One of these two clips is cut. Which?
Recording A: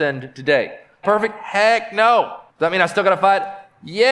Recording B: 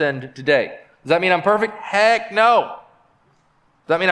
A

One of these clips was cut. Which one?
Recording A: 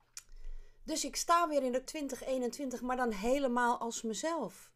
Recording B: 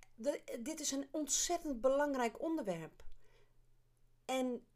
A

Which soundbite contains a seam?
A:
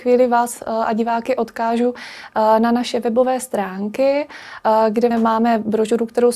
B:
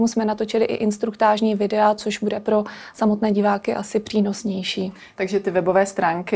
A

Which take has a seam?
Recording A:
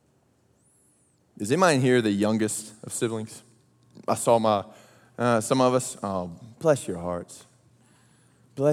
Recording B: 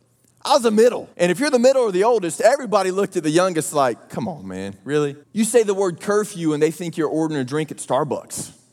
B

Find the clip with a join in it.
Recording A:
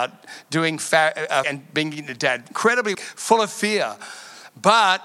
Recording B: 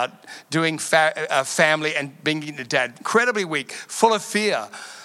A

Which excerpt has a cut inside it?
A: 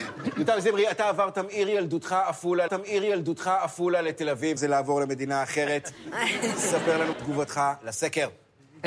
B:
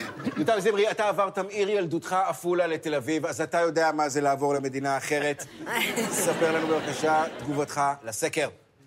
A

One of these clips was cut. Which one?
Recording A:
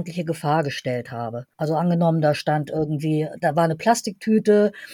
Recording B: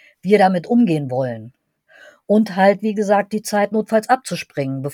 A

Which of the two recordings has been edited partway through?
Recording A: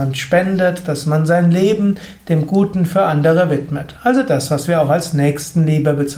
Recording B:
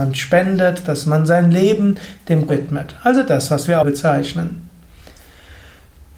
B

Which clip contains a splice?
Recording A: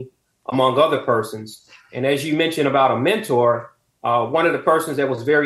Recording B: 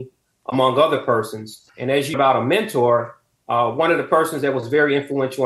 B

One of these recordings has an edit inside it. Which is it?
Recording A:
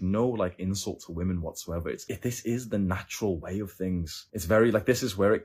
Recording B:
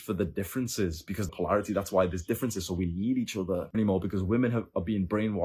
B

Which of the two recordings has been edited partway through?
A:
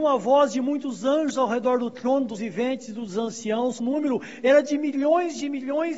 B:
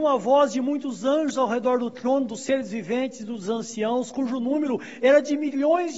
A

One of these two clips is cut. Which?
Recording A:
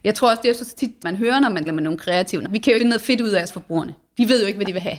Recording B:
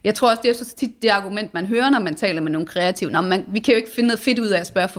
A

